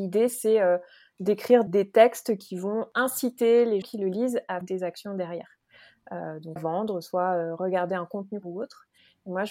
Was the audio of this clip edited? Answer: yes; 5 cuts; at 1.7 s, 3.8 s, 4.6 s, 6.6 s, 8.4 s

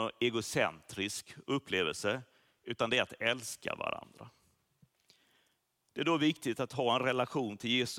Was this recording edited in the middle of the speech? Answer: no; 0 cuts

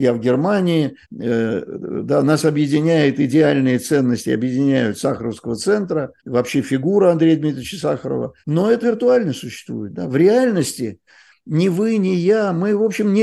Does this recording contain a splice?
yes; 4 cuts; at 1.0 s, 6.2 s, 8.4 s, 8.8 s

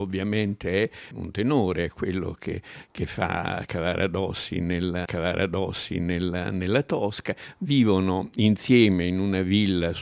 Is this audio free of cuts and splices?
no; 1 cut; at 5.1 s

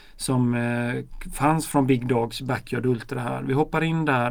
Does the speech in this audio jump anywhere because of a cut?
no; 0 cuts

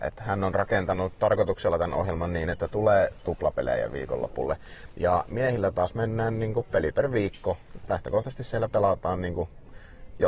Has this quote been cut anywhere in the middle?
no; 0 cuts

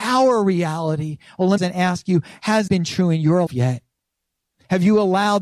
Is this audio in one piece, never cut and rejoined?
no; 3 cuts; at 1.6 s, 2.7 s, 3.5 s

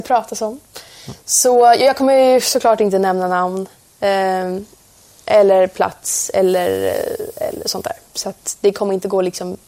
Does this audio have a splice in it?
no; 0 cuts

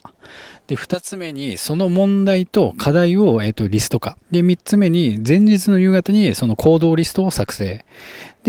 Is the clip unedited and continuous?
no; 1 cut; at 4.2 s

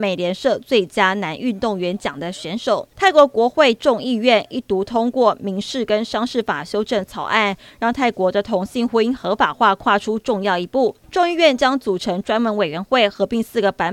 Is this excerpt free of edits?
no; 2 cuts; at 2.9 s, 11.0 s

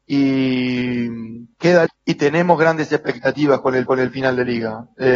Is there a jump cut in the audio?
yes; 2 cuts; at 1.9 s, 3.9 s

